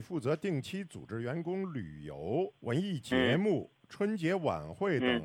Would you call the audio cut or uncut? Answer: cut